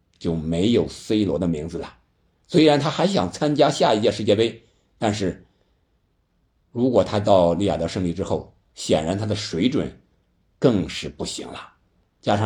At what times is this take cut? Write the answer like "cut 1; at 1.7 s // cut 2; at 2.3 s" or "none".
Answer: none

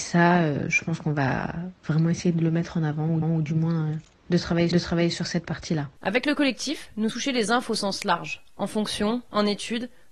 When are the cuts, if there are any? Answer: cut 1; at 3.2 s // cut 2; at 4.7 s // cut 3; at 6.0 s // cut 4; at 7.1 s

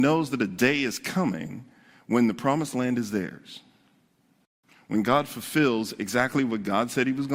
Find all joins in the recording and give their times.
none

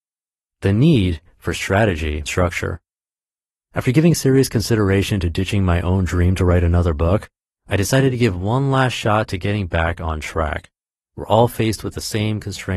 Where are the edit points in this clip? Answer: cut 1; at 2.3 s

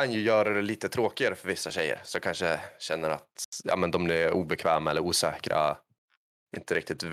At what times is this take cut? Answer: none

